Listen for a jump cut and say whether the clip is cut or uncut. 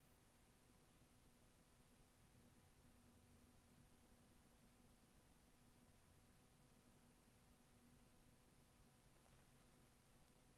uncut